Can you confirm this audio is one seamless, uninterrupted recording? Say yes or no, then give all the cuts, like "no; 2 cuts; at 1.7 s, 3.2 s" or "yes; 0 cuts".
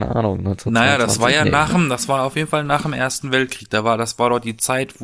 yes; 0 cuts